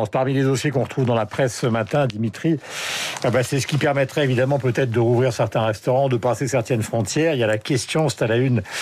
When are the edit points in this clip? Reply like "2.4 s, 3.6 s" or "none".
none